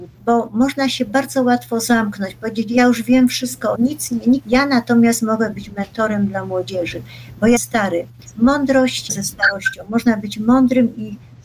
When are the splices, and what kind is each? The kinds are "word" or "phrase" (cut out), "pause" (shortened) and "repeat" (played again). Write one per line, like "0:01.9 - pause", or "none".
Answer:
0:03.7 - phrase
0:04.4 - phrase
0:07.6 - word
0:09.1 - phrase